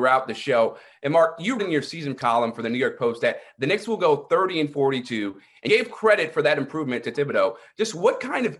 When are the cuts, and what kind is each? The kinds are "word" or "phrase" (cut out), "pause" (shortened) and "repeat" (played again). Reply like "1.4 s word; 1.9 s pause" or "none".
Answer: 1.6 s word; 2.2 s word; 5.7 s word; 7.1 s word